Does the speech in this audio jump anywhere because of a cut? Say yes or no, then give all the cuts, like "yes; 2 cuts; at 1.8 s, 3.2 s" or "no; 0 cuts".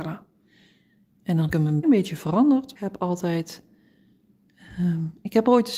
yes; 3 cuts; at 1.5 s, 1.8 s, 2.8 s